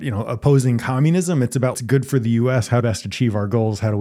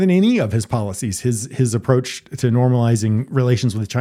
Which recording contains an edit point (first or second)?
first